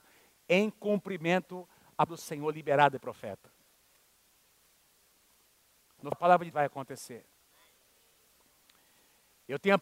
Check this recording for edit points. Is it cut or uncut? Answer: cut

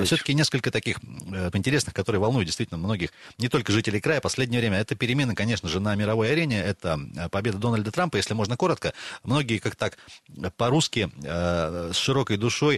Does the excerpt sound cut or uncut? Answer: cut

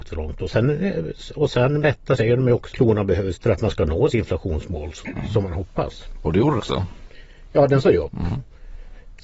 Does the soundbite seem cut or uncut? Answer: cut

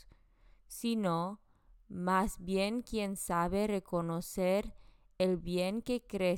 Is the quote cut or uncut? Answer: uncut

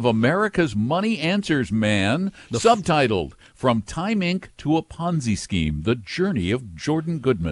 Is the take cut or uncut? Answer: uncut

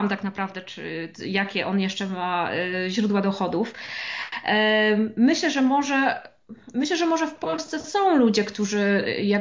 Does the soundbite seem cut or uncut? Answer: uncut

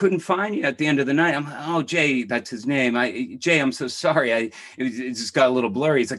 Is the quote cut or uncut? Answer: uncut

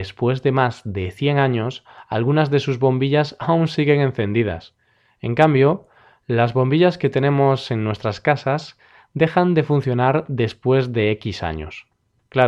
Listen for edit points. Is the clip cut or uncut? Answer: uncut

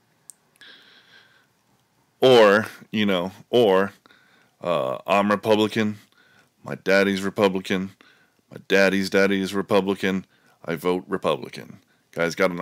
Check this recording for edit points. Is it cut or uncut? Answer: uncut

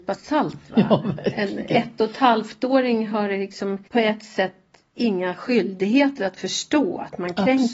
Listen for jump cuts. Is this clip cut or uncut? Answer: cut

